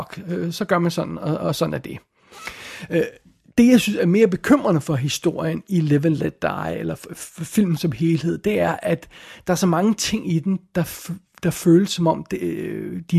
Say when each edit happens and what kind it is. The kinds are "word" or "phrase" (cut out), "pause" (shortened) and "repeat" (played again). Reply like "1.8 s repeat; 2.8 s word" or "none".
none